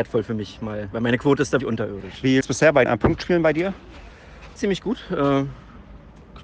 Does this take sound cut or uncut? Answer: cut